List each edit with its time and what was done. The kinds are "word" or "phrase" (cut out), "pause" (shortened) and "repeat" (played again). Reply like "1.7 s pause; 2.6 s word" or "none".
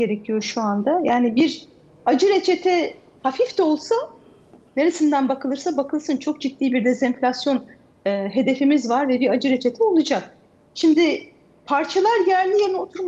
none